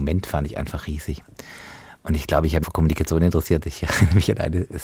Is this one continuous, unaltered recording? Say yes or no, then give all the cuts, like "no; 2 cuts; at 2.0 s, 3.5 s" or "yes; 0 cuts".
no; 1 cut; at 2.6 s